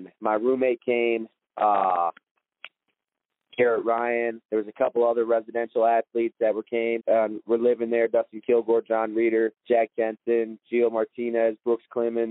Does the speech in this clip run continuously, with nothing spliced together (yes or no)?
no